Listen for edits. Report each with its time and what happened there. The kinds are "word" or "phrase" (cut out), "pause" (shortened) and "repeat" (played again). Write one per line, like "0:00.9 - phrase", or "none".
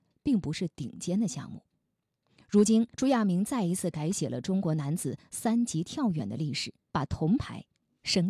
0:02.9 - pause
0:06.9 - pause